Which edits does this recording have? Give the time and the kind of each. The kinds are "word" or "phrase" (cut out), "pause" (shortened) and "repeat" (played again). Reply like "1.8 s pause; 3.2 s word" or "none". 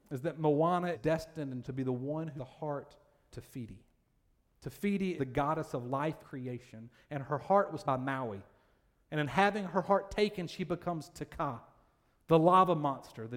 0.9 s word; 1.6 s word; 2.4 s word; 3.3 s word; 5.2 s word; 6.2 s word; 7.8 s word